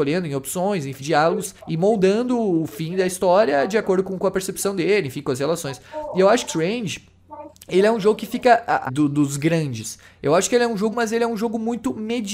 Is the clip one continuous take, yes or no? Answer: no